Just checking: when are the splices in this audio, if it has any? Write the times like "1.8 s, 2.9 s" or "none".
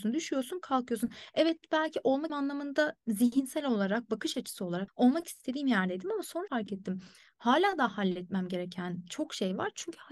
2.3 s, 4.9 s, 6.5 s